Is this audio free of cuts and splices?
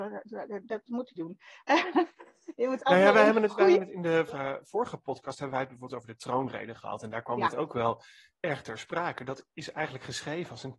no; 2 cuts; at 1.2 s, 4.3 s

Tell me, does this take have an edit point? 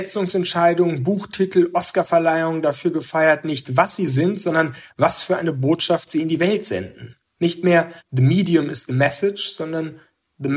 yes; 2 cuts; at 7.2 s, 8.0 s

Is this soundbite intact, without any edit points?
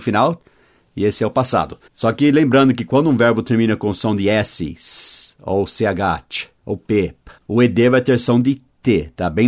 no; 3 cuts; at 1.9 s, 6.6 s, 7.4 s

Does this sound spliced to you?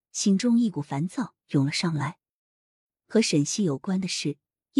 no; 0 cuts

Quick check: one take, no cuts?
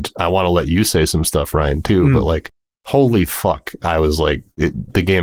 yes; 0 cuts

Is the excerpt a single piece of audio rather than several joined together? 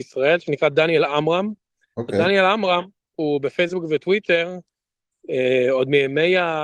yes; 0 cuts

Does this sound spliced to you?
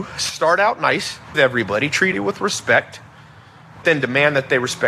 yes; 3 cuts; at 1.3 s, 2.1 s, 3.8 s

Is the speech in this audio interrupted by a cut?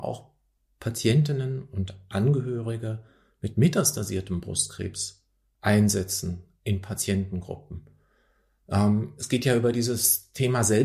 no; 0 cuts

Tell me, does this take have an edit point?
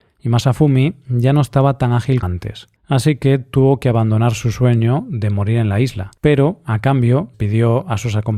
yes; 4 cuts; at 2.2 s, 2.8 s, 6.2 s, 7.3 s

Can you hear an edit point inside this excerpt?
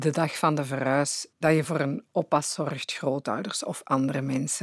no; 0 cuts

